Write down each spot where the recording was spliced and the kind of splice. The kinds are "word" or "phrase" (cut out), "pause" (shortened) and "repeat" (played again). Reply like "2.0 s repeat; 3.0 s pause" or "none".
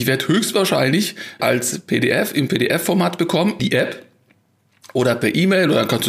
1.4 s phrase; 3.6 s word